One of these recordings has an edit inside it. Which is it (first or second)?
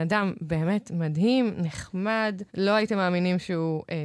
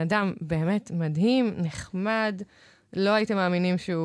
first